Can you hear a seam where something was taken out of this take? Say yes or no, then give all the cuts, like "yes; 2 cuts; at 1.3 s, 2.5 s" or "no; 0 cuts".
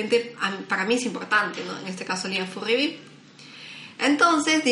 no; 0 cuts